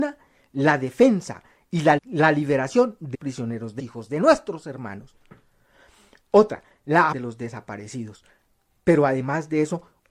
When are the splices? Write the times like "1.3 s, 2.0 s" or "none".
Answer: 2.0 s, 3.1 s, 3.8 s, 7.1 s